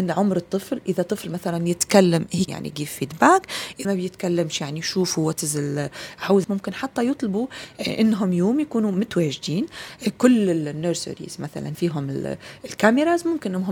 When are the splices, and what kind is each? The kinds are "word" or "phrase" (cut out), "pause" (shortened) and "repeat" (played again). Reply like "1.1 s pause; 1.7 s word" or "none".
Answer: 2.5 s word; 3.8 s word; 6.4 s word; 11.7 s word